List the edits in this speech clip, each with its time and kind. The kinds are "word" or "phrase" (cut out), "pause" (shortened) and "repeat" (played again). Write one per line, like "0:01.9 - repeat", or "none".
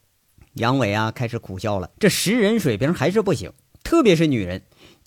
0:01.9 - pause

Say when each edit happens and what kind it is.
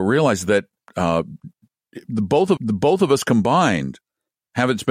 0:02.6 - repeat

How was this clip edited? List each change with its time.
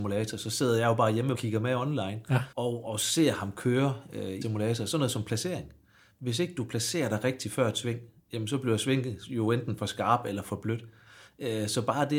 0:01.3 - phrase
0:02.5 - pause
0:04.4 - word

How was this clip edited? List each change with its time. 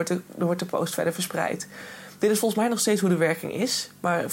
none

